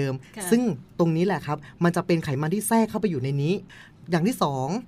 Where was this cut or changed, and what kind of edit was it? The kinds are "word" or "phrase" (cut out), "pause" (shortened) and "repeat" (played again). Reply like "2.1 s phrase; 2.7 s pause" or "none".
none